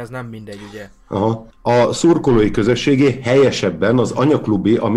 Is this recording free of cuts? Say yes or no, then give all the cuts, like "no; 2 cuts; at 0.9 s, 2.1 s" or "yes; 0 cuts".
no; 1 cut; at 1.5 s